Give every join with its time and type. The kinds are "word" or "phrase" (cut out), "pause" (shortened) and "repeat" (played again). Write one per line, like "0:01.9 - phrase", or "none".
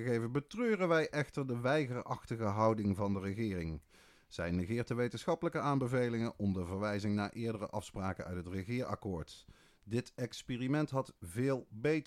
none